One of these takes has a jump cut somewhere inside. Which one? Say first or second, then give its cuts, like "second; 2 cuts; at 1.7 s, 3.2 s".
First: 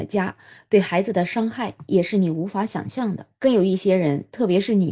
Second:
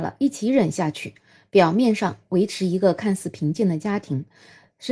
first; 1 cut; at 3.3 s